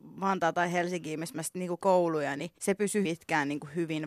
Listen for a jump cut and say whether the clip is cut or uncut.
cut